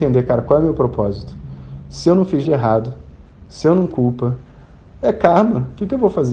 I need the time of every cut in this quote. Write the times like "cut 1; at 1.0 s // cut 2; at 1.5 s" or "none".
cut 1; at 2.4 s // cut 2; at 3.9 s